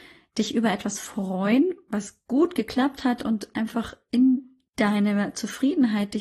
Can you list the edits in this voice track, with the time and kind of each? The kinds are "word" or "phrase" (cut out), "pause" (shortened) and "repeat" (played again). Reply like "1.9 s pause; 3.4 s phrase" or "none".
4.7 s pause